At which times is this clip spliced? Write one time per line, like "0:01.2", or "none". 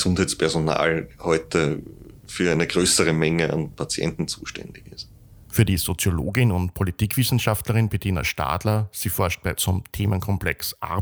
0:09.6